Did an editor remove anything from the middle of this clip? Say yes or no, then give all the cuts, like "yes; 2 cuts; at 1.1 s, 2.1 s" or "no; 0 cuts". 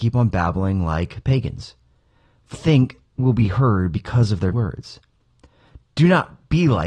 yes; 3 cuts; at 2.5 s, 3.2 s, 4.5 s